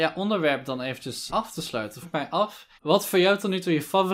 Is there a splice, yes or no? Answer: yes